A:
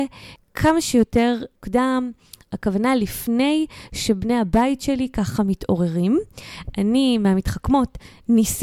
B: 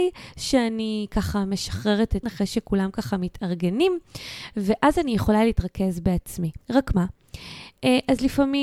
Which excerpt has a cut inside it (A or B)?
B